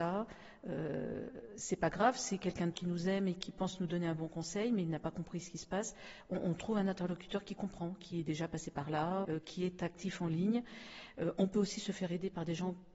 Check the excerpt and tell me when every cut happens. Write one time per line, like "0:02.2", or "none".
0:02.7
0:09.2